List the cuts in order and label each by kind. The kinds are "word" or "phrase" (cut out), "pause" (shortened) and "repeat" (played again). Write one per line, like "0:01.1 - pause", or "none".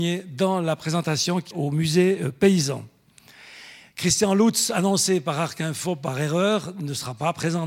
0:01.5 - word